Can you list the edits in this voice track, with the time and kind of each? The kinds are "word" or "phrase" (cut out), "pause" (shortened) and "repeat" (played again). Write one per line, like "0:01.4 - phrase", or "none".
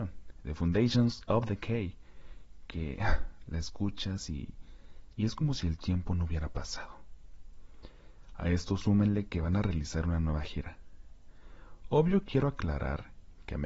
none